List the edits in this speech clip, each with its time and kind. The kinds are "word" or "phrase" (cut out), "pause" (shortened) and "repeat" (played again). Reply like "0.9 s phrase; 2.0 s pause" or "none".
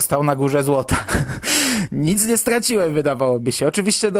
none